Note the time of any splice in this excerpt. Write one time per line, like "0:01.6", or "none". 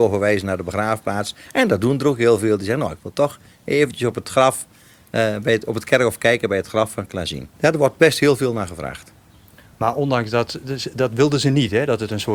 0:07.5